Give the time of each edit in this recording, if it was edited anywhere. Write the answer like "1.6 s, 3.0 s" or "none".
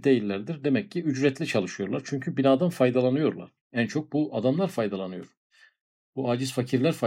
3.6 s